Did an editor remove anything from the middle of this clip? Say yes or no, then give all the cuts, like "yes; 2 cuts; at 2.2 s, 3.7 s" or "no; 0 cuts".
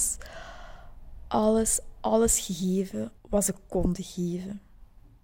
yes; 1 cut; at 3.2 s